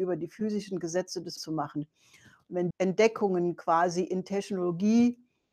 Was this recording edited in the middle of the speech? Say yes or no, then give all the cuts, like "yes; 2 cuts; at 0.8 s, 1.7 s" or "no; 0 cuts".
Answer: yes; 2 cuts; at 1.4 s, 2.7 s